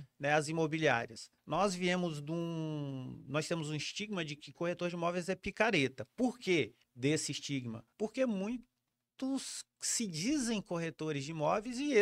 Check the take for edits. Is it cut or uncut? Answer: cut